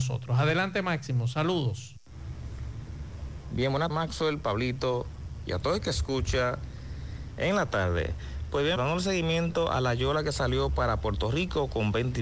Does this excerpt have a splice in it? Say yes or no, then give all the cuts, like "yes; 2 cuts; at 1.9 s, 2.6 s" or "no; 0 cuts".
yes; 2 cuts; at 3.9 s, 8.8 s